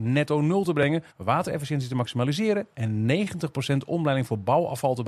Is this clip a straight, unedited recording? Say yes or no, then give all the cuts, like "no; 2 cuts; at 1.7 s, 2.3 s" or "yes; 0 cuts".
no; 1 cut; at 1.1 s